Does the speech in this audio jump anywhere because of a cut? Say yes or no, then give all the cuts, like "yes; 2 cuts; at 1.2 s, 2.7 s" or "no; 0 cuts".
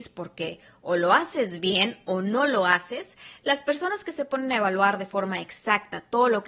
no; 0 cuts